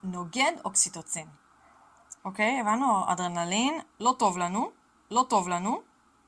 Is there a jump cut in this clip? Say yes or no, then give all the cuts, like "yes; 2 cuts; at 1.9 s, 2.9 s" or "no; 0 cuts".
yes; 2 cuts; at 2.2 s, 5.0 s